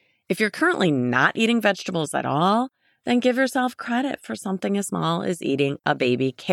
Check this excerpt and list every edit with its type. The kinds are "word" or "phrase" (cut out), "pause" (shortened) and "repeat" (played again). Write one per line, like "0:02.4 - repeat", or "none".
none